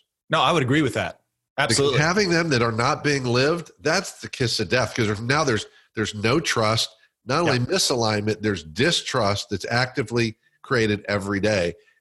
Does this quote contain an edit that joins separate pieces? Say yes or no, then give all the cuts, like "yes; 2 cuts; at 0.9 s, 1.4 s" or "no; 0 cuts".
no; 0 cuts